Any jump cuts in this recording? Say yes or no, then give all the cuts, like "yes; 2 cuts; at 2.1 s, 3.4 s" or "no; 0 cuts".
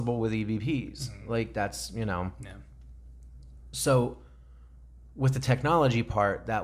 no; 0 cuts